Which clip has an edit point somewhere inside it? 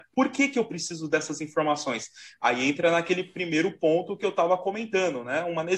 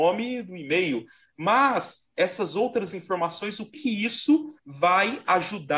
second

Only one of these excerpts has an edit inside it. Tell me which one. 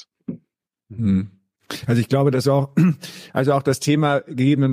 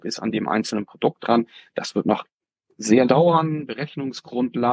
second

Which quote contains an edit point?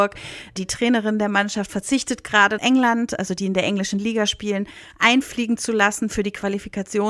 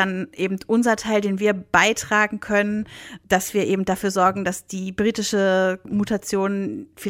first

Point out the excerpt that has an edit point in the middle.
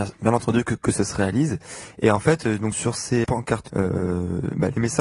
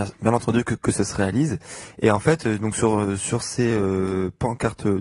first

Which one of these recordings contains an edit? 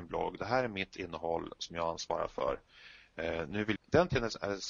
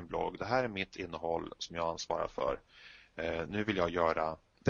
first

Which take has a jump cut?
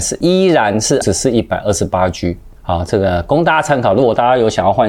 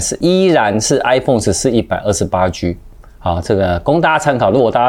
first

